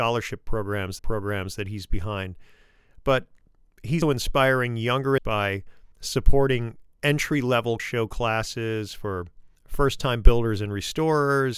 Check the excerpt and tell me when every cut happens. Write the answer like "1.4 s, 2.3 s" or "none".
1.0 s, 4.0 s, 5.2 s, 5.9 s, 7.8 s, 9.5 s